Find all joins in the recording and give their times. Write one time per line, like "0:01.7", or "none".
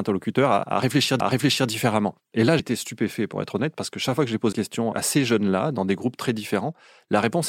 0:01.2
0:02.6
0:04.5